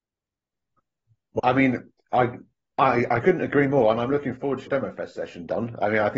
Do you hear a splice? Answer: yes; 2 cuts; at 1.4 s, 4.7 s

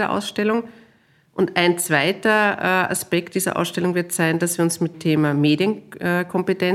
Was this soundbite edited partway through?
yes; 1 cut; at 4.9 s

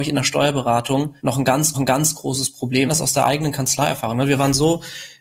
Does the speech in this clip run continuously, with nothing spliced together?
no; 3 cuts; at 1.2 s, 1.7 s, 2.9 s

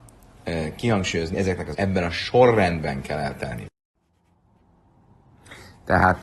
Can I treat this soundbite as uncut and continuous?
no; 2 cuts; at 1.3 s, 1.7 s

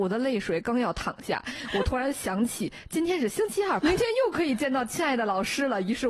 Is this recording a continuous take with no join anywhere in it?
no; 1 cut; at 3.8 s

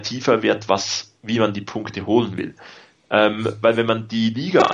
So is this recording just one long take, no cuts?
yes; 0 cuts

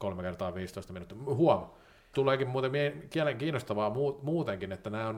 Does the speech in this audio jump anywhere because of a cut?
yes; 1 cut; at 2.1 s

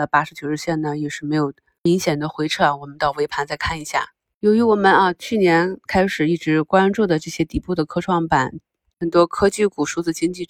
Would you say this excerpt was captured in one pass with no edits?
yes; 0 cuts

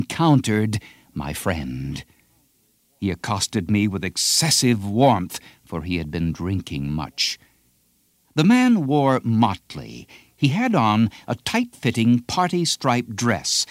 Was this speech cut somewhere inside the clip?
no; 0 cuts

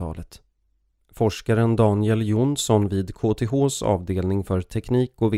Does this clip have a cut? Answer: no; 0 cuts

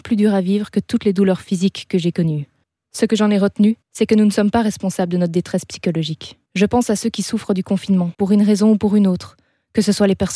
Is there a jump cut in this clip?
yes; 4 cuts; at 2.6 s, 3.8 s, 6.5 s, 8.1 s

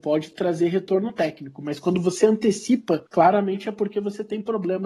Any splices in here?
yes; 1 cut; at 3.1 s

